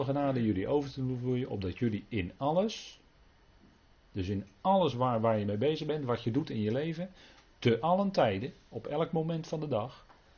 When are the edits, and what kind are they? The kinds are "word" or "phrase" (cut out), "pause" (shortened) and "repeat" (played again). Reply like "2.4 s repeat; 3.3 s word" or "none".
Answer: none